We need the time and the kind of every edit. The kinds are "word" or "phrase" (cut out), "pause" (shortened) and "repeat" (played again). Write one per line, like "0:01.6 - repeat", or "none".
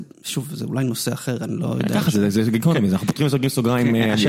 none